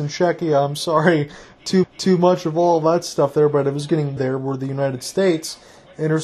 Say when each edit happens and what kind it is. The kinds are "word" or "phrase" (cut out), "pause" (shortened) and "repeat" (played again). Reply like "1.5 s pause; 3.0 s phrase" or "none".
1.8 s repeat; 4.2 s phrase